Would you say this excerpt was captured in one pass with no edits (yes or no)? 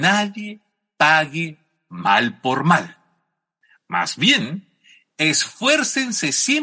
yes